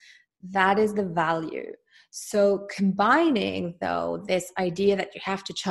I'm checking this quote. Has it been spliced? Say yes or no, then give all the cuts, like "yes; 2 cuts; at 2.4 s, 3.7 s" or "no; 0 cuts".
no; 0 cuts